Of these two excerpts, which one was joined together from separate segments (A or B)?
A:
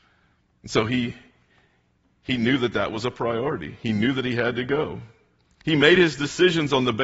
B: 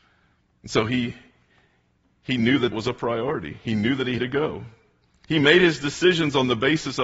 B